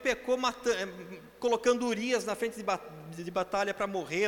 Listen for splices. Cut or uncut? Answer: uncut